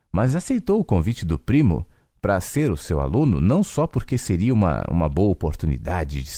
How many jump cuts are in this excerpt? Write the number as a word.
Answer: zero